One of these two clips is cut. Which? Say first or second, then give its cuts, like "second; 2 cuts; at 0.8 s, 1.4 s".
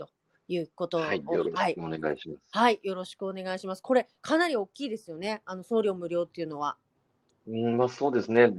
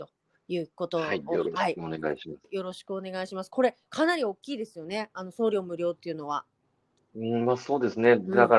second; 1 cut; at 2.4 s